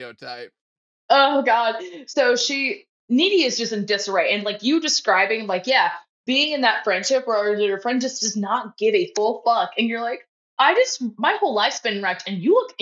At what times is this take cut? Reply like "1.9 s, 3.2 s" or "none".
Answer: 3.0 s